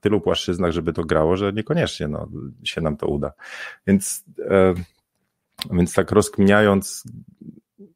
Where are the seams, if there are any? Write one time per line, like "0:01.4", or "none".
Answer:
0:00.9